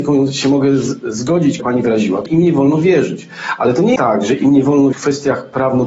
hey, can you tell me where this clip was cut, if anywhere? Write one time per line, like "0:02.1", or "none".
0:01.6
0:02.3
0:04.0
0:04.9